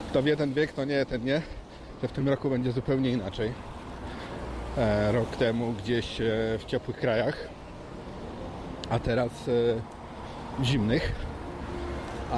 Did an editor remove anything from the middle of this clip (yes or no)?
no